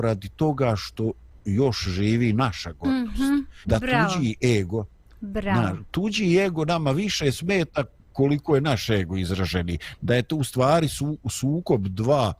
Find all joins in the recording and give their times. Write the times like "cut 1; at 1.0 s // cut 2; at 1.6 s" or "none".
cut 1; at 3.6 s